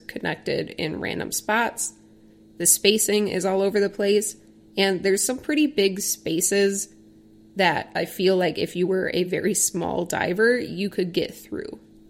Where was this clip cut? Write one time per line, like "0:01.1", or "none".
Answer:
none